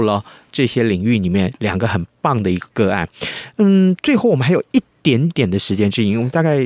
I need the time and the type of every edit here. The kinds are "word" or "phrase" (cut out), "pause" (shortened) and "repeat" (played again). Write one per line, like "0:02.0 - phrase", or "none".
none